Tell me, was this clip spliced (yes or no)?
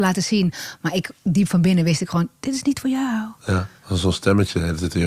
yes